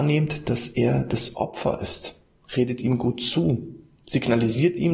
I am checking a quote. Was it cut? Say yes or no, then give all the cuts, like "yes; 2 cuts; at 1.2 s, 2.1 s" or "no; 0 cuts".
no; 0 cuts